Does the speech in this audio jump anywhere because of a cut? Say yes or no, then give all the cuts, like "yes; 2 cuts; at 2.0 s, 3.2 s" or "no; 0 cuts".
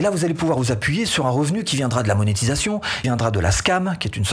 yes; 1 cut; at 3.0 s